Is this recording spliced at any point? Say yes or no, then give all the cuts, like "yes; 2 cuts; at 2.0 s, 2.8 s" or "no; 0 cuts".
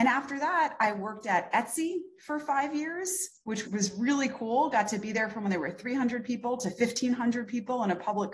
yes; 1 cut; at 3.6 s